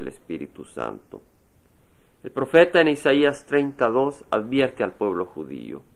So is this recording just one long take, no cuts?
yes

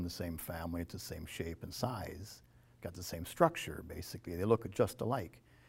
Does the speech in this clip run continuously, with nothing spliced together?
yes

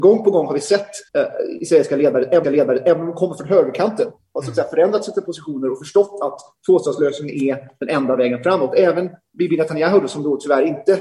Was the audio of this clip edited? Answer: yes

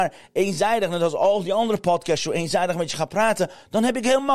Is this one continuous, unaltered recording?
yes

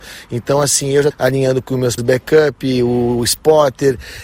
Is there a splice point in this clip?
yes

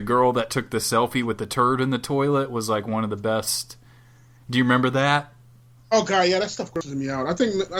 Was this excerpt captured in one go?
yes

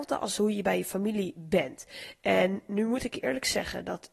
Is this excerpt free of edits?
yes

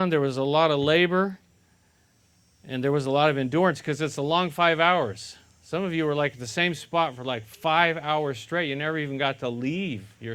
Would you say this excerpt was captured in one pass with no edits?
yes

